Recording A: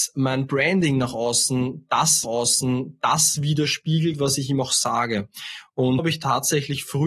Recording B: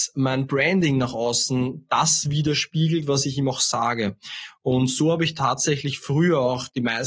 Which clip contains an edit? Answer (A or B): A